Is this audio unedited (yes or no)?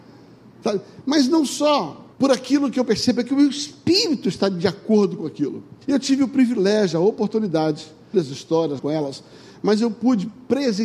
no